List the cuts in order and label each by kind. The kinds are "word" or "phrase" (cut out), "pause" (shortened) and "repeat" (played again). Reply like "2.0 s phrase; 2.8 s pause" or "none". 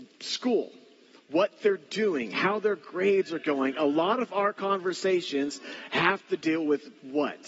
none